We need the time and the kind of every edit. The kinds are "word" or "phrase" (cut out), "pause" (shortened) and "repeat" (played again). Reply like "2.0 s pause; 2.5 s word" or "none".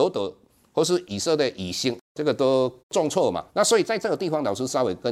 2.8 s pause; 3.5 s pause